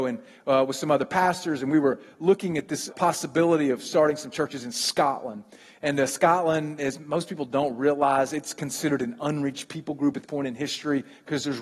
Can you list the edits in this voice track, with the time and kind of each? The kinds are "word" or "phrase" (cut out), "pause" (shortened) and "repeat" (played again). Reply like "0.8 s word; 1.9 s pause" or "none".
2.9 s word; 10.2 s word